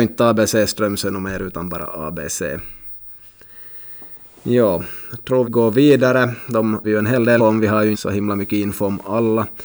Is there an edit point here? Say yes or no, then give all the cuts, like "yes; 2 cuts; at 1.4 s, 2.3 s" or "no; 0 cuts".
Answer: yes; 4 cuts; at 5.4 s, 6.8 s, 7.4 s, 7.9 s